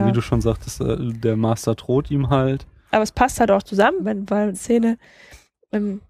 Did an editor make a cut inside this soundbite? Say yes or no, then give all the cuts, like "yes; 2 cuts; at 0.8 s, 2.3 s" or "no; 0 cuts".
yes; 2 cuts; at 4.0 s, 4.5 s